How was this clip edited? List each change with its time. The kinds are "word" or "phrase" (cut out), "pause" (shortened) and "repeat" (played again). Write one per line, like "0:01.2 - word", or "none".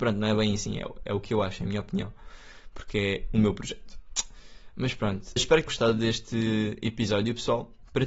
0:05.4 - word
0:05.7 - word